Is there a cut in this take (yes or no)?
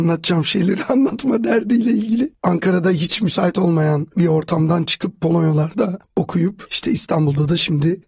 no